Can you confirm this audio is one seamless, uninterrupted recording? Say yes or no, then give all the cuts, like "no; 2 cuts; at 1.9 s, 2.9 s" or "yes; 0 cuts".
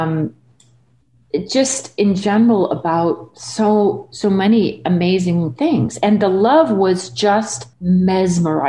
no; 1 cut; at 7.7 s